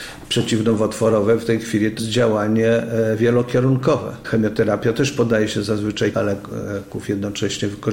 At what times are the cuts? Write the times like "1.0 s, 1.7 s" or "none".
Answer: 2.0 s, 6.1 s

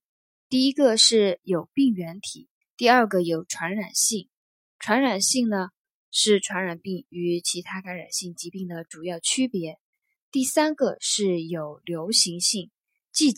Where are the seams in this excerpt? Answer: 2.6 s

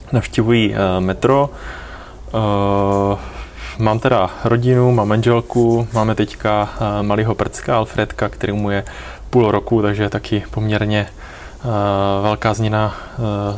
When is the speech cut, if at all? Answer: none

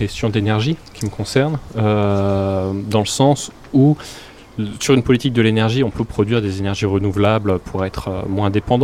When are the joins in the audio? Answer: none

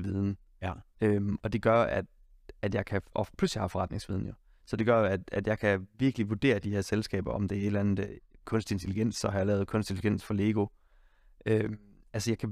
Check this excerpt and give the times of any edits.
3.1 s

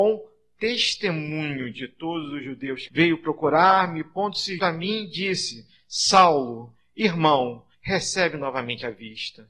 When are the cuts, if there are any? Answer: 2.9 s, 4.6 s, 7.7 s

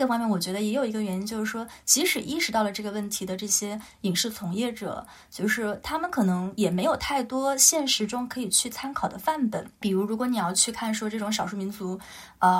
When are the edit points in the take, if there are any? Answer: 9.8 s

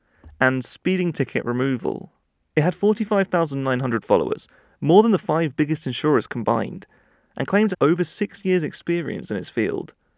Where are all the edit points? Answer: 7.7 s

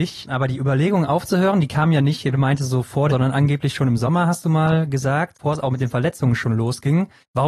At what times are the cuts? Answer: 2.3 s, 3.1 s

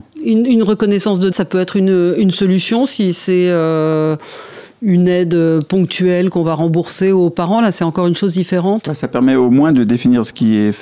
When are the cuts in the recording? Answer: 1.3 s

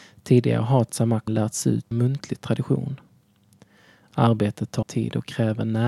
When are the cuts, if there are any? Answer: 1.3 s, 1.9 s, 4.8 s

